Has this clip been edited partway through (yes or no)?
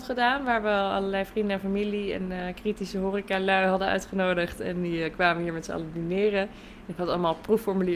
no